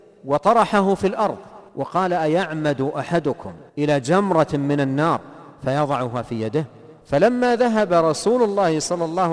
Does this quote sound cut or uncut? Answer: cut